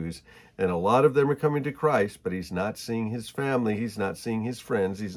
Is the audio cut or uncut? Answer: uncut